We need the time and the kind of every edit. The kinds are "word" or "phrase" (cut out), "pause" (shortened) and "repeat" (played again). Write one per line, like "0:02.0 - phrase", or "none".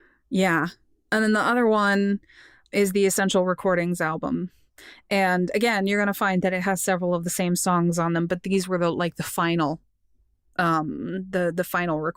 none